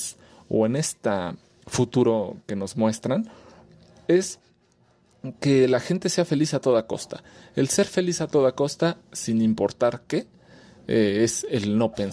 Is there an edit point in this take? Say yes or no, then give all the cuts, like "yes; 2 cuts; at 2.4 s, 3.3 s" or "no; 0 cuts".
no; 0 cuts